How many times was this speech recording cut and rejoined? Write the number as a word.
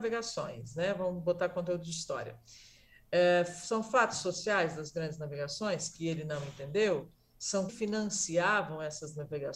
one